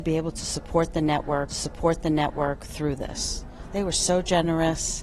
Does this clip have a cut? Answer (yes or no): yes